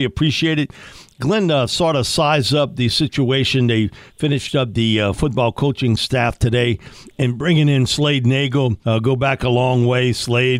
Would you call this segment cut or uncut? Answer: cut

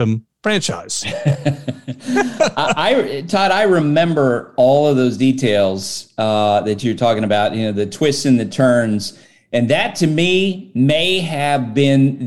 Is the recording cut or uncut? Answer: uncut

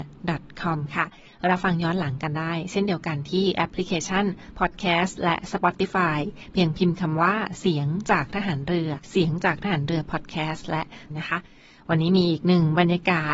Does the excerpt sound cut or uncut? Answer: cut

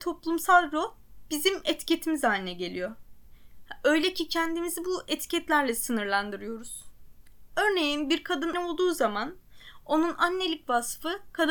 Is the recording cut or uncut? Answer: cut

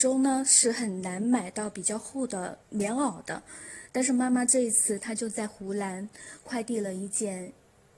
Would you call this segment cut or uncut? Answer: cut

